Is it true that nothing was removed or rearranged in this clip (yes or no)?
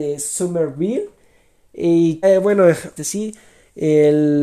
no